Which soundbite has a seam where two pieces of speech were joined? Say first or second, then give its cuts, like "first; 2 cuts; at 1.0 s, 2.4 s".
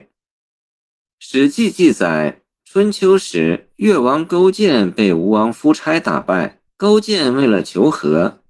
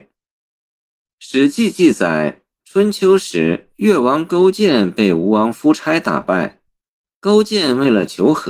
first; 1 cut; at 6.7 s